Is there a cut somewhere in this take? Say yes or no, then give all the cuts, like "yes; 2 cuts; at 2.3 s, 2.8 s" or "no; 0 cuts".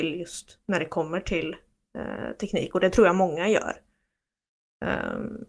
no; 0 cuts